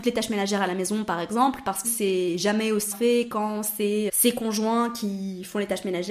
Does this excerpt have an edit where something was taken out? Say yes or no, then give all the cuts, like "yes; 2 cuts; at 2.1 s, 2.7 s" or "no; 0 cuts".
yes; 3 cuts; at 1.8 s, 2.9 s, 4.1 s